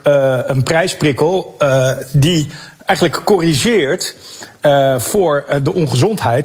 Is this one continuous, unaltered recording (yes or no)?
yes